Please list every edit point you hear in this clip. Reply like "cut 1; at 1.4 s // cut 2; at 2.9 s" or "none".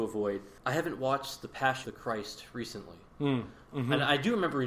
cut 1; at 1.8 s

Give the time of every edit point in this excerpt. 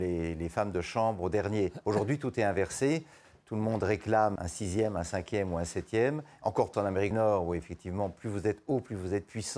cut 1; at 4.4 s // cut 2; at 6.7 s // cut 3; at 7.1 s

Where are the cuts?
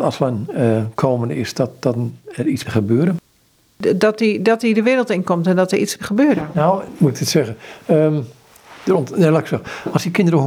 cut 1; at 2.6 s // cut 2; at 6.0 s // cut 3; at 6.9 s

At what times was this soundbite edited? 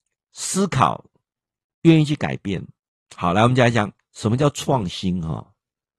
cut 1; at 2.9 s

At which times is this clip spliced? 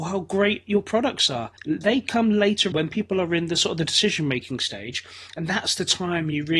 cut 1; at 1.6 s // cut 2; at 2.7 s

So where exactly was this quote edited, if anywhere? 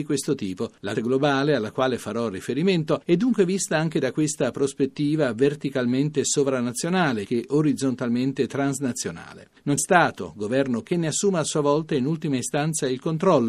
cut 1; at 0.9 s // cut 2; at 7.2 s // cut 3; at 9.8 s // cut 4; at 10.8 s

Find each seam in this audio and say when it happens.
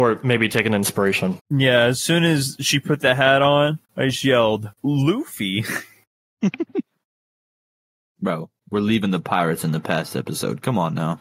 cut 1; at 1.4 s // cut 2; at 3.8 s // cut 3; at 4.7 s // cut 4; at 8.6 s

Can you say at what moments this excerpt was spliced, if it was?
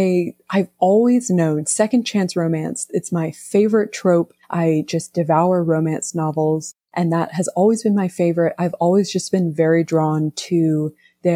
cut 1; at 4.4 s // cut 2; at 6.8 s

